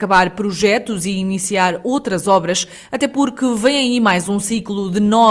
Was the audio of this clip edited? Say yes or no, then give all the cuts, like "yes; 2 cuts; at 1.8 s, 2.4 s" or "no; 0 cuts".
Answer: no; 0 cuts